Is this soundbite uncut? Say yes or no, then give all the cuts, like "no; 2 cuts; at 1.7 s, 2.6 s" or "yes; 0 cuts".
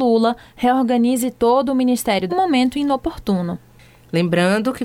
no; 1 cut; at 2.3 s